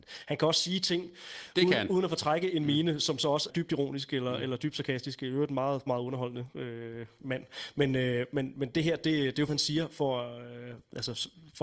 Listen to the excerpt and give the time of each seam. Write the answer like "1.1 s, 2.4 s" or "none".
3.5 s, 5.9 s, 9.5 s